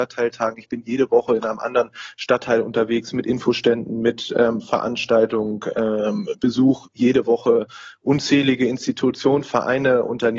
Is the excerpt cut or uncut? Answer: uncut